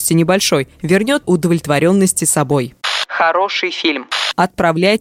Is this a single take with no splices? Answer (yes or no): no